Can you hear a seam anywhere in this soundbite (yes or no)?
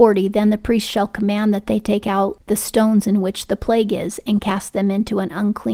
no